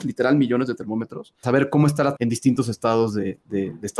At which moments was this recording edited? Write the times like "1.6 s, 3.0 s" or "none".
1.4 s, 2.2 s